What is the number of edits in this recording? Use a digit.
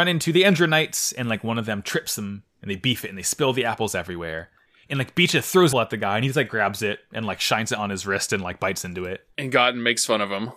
1